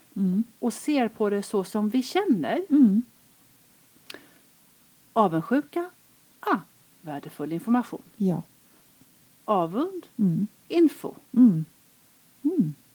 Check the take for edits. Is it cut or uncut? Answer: uncut